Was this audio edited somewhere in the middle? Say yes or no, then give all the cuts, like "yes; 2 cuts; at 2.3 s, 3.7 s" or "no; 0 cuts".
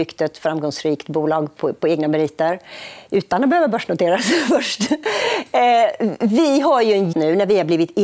yes; 1 cut; at 7.1 s